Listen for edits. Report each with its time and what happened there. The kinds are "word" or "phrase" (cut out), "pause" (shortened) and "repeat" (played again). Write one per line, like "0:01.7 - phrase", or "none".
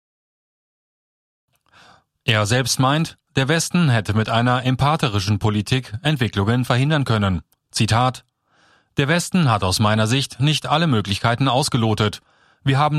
none